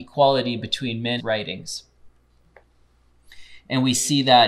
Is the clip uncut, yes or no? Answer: no